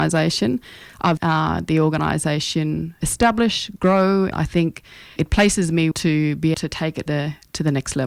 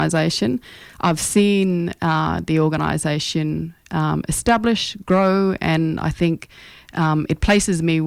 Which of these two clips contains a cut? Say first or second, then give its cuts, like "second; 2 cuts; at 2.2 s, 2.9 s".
first; 7 cuts; at 1.2 s, 3.0 s, 4.3 s, 5.2 s, 5.9 s, 6.5 s, 7.1 s